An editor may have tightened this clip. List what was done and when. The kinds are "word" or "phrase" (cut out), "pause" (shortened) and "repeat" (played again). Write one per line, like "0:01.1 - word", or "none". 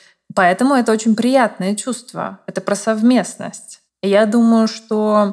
0:03.9 - pause